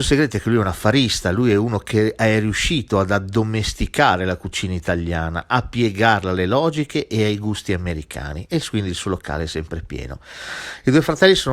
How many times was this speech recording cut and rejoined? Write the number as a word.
zero